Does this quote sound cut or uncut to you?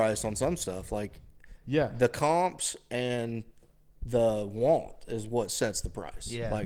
uncut